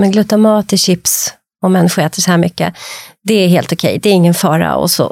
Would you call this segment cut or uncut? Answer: uncut